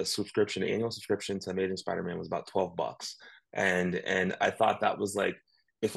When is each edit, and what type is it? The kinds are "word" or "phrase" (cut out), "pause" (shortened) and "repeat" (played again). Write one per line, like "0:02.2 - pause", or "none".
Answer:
none